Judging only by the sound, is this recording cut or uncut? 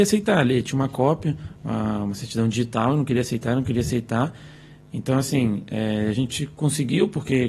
uncut